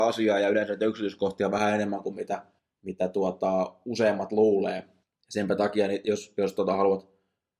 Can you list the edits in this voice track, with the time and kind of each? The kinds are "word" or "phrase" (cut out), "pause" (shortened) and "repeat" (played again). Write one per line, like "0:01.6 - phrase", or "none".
0:02.6 - pause
0:05.0 - pause